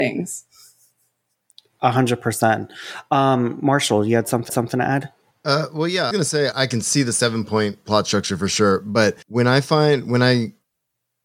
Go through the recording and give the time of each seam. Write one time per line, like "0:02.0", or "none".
0:04.5
0:05.3
0:06.1
0:06.5
0:07.8
0:09.2